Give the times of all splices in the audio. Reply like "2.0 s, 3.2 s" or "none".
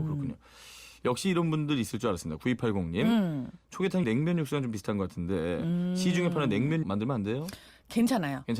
4.0 s, 6.8 s

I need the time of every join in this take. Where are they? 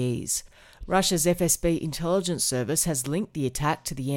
none

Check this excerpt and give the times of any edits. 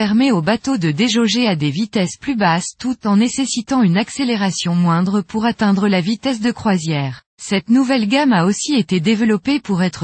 7.3 s

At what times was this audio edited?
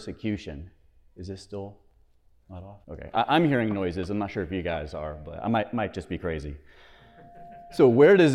2.8 s

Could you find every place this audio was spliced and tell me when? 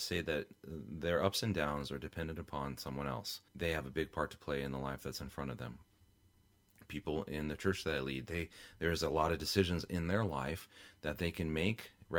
3.5 s

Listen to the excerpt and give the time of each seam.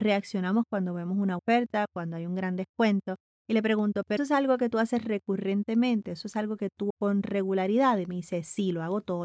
1.4 s, 4.2 s, 6.9 s

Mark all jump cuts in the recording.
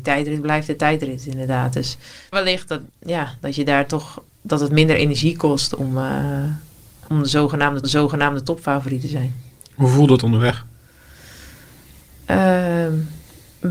2.3 s, 2.9 s, 7.1 s, 7.8 s

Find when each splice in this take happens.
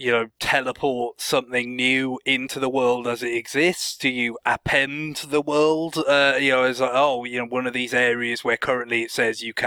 none

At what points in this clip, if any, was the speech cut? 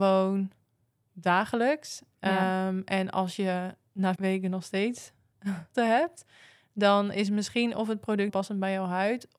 4.2 s, 5.7 s, 8.3 s

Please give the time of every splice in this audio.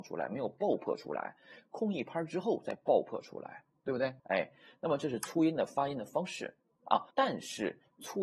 3.7 s, 4.2 s, 7.1 s

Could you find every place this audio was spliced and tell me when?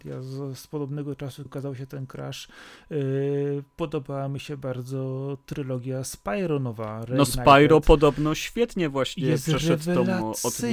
1.5 s

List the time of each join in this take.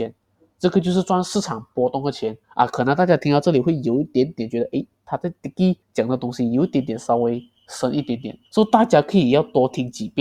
2.4 s, 5.8 s, 8.5 s

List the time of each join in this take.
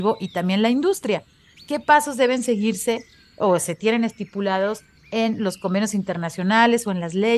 none

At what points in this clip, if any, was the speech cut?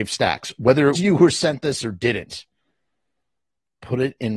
0.9 s

